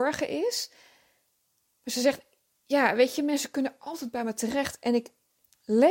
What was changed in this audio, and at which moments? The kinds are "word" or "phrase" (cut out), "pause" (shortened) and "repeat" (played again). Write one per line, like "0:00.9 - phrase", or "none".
none

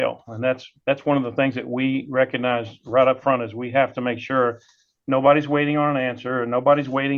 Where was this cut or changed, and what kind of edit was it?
none

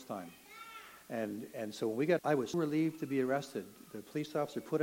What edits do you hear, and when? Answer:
0:02.2 - word
0:02.5 - word

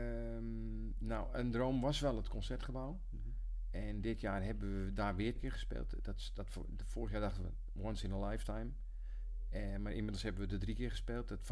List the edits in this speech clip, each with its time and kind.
0:05.4 - word

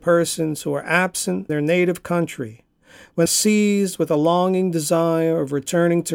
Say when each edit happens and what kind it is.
0:01.5 - word
0:03.3 - phrase

